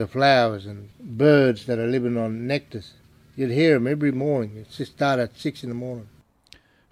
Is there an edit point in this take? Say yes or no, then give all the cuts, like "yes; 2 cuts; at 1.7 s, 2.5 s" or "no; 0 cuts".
yes; 1 cut; at 0.9 s